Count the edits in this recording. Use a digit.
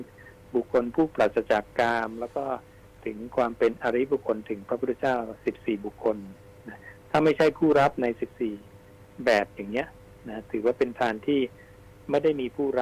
0